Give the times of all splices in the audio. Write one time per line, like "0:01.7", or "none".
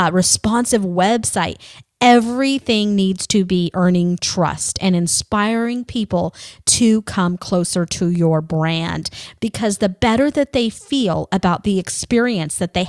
none

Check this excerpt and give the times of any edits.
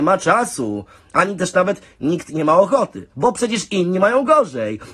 0:03.1

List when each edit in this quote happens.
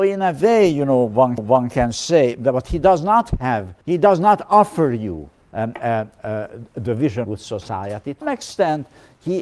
0:01.4
0:03.8
0:07.2
0:08.2

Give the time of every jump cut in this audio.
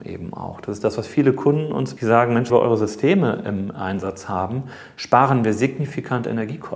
0:02.0
0:02.5

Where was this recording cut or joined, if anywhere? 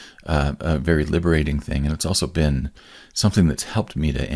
none

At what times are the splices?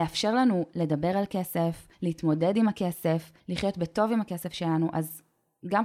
0:01.9
0:03.4

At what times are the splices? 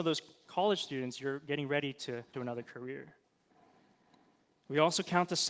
0:02.3

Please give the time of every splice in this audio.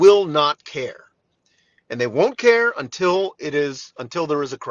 none

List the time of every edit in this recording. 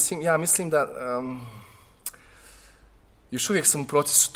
none

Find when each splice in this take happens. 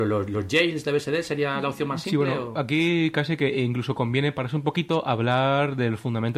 none

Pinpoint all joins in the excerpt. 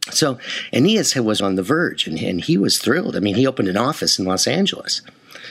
0:01.4

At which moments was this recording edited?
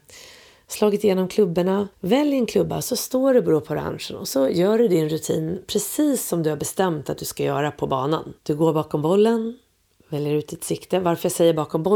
0:01.9
0:08.4

